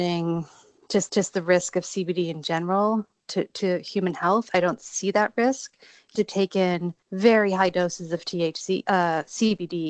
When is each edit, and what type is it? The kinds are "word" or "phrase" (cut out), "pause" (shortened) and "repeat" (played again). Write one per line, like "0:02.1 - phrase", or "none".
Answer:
0:01.1 - repeat
0:06.1 - phrase
0:07.0 - pause